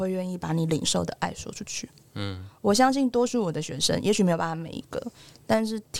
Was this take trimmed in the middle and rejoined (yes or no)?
no